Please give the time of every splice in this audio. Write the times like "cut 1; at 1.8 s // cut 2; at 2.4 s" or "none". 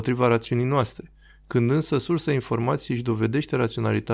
none